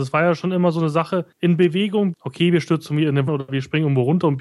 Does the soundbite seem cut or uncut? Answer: cut